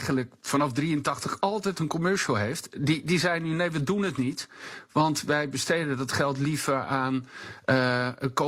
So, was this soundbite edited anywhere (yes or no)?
no